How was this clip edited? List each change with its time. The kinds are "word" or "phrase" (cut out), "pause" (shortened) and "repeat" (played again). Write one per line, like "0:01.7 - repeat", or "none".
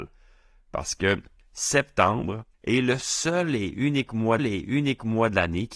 0:02.5 - pause
0:04.4 - repeat